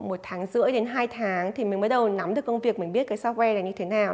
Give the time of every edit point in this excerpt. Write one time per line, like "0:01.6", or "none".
none